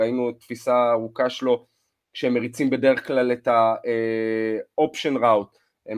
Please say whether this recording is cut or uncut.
uncut